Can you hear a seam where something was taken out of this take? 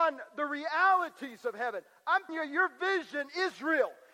yes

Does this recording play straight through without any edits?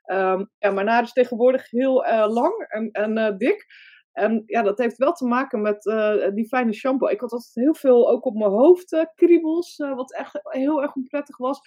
yes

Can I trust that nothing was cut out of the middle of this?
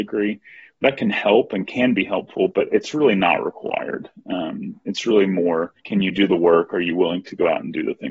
no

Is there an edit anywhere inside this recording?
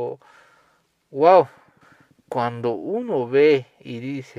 yes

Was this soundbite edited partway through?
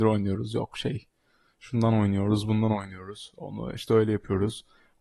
no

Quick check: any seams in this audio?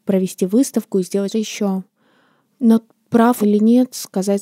yes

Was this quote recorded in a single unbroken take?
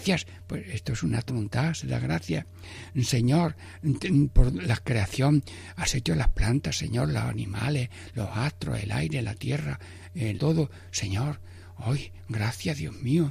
no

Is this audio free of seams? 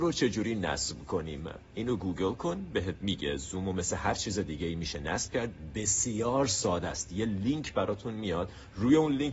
yes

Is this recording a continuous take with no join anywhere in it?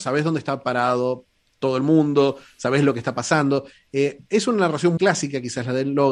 no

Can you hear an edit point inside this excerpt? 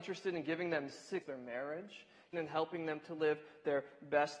yes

